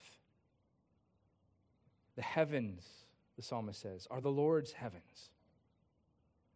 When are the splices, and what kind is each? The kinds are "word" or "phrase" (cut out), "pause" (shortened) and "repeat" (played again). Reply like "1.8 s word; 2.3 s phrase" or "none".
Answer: none